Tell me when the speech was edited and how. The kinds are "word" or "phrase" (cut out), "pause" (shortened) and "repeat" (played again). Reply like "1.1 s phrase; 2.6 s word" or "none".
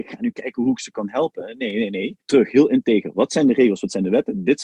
2.2 s pause